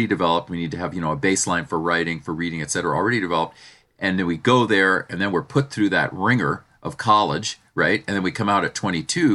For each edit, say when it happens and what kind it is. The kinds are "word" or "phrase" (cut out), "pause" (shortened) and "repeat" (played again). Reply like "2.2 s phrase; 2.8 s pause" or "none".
none